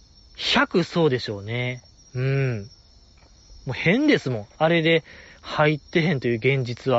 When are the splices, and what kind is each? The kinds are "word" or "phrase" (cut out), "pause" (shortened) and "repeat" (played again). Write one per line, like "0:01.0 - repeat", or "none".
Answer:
none

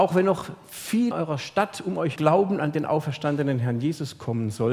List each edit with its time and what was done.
0:01.1 - word
0:02.2 - phrase

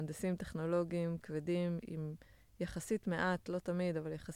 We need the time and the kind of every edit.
none

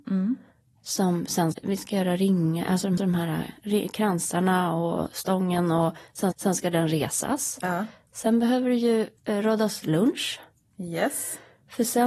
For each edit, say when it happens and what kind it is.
0:01.5 - word
0:03.0 - repeat
0:06.3 - repeat
0:09.2 - pause

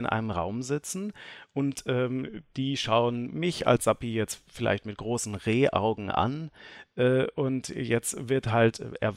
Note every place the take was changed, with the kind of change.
none

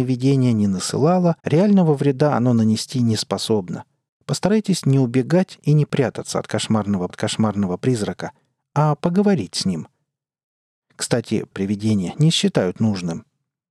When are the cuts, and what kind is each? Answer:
0:01.4 - pause
0:04.1 - pause
0:07.1 - repeat
0:11.5 - word

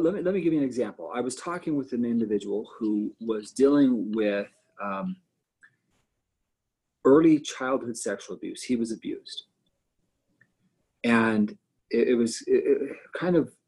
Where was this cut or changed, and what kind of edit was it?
none

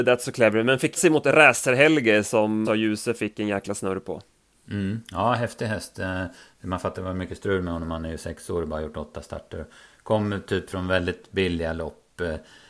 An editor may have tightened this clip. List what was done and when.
0:01.0 - word
0:02.6 - word
0:06.9 - word

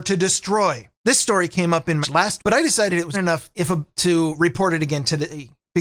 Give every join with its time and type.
0:00.9 - pause
0:02.0 - word
0:02.4 - word
0:03.1 - word
0:03.5 - word
0:03.9 - phrase

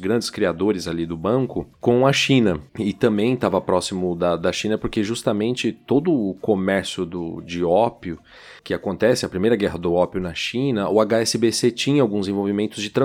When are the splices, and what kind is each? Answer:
0:02.7 - pause
0:08.6 - pause

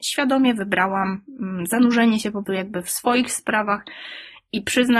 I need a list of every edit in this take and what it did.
0:02.4 - word

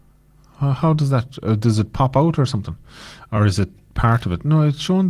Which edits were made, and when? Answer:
none

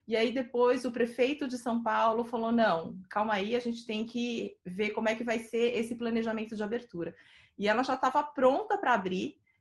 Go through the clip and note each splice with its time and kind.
none

